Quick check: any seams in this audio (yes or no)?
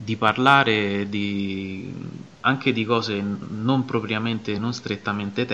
no